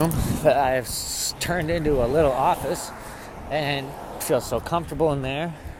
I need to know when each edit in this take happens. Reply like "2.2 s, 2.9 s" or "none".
4.2 s